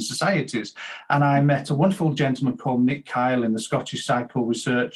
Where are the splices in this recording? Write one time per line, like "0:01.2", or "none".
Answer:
none